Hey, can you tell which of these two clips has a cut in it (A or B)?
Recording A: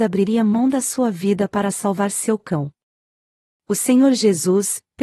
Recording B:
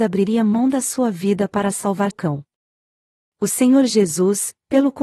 B